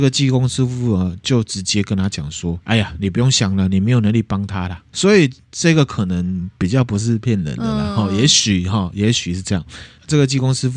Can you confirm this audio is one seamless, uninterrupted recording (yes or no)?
yes